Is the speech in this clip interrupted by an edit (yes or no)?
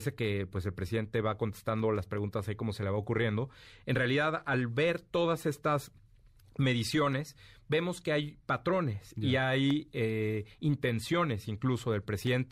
no